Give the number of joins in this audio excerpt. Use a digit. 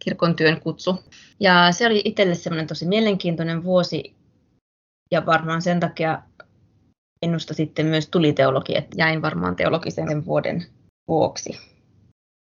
2